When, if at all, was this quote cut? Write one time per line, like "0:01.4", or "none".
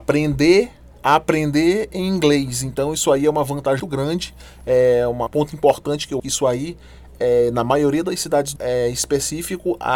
0:00.9
0:03.8
0:05.3
0:06.2
0:08.6